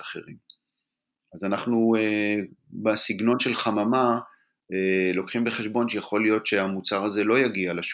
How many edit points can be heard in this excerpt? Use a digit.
0